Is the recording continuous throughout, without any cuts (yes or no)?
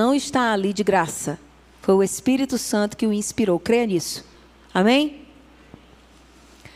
yes